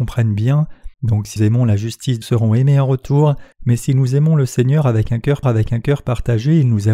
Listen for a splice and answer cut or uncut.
cut